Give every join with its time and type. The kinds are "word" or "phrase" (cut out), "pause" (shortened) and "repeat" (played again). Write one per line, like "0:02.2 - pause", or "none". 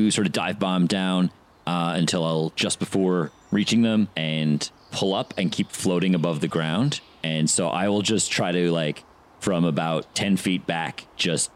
0:04.1 - pause